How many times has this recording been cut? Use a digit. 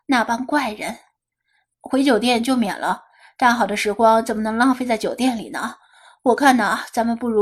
0